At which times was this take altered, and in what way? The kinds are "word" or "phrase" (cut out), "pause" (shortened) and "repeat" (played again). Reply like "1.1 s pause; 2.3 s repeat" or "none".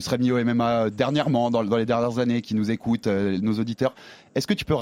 none